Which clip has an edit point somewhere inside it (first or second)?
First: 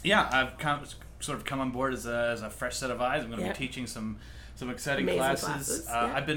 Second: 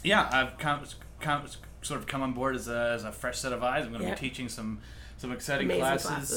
second